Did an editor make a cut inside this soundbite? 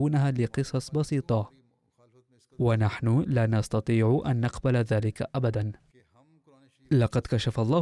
no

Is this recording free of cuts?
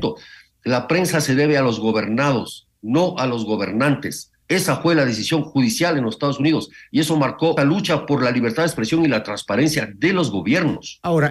no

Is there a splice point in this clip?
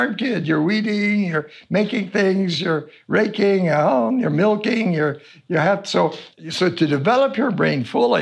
no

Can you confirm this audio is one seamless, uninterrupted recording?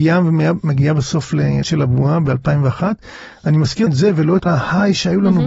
no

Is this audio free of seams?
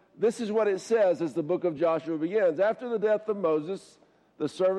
yes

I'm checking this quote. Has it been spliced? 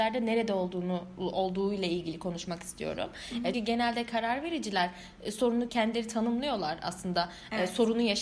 yes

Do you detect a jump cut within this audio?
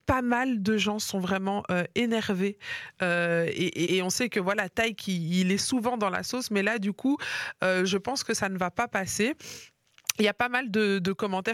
yes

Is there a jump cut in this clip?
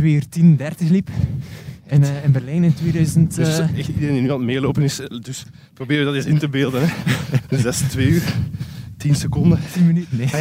no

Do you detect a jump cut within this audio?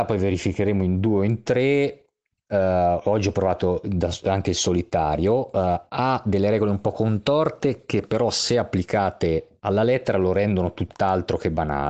no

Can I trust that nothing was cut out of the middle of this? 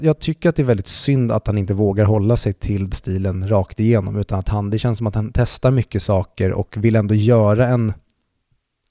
no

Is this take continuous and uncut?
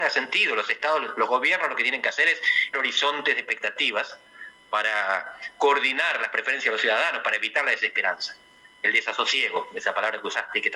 no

